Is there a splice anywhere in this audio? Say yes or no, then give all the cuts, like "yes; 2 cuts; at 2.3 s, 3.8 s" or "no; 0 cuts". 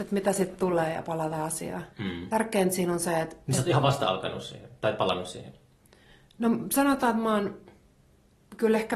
yes; 1 cut; at 1.9 s